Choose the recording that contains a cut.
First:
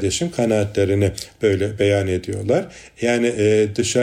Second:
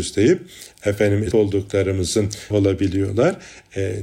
second; 2 cuts; at 1.3 s, 2.5 s

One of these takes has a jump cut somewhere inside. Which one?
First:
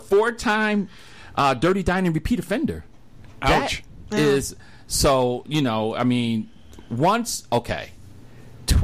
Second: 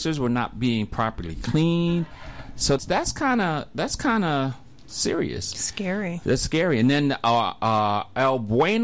second; 1 cut; at 2.8 s

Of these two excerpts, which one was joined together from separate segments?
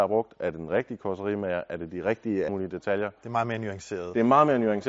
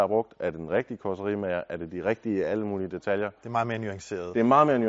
first; 1 cut; at 2.5 s

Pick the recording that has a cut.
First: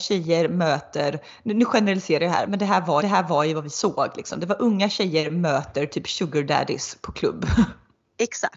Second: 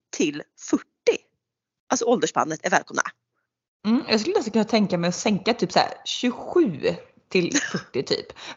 first; 2 cuts; at 2.5 s, 3.0 s

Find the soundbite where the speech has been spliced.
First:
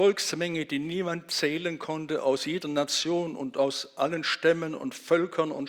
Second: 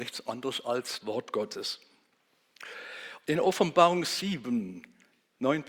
second; 1 cut; at 1.0 s

